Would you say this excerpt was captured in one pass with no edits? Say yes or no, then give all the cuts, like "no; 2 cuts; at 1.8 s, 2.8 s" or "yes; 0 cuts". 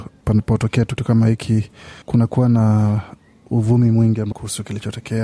no; 3 cuts; at 1.0 s, 2.0 s, 4.3 s